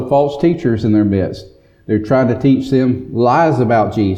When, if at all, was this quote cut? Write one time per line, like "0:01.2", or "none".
none